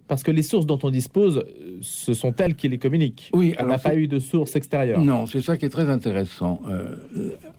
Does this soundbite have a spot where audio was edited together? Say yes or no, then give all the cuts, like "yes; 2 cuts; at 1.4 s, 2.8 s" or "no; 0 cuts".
no; 0 cuts